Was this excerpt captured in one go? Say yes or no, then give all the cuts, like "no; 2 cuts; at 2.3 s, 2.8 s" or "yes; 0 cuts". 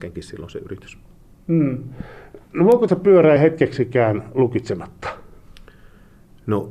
no; 2 cuts; at 2.9 s, 3.4 s